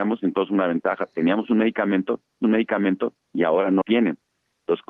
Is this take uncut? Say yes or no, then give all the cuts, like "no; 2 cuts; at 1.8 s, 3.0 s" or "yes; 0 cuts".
no; 2 cuts; at 2.4 s, 3.8 s